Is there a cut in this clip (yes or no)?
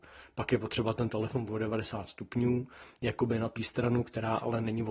yes